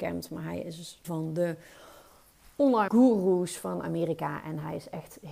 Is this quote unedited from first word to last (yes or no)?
no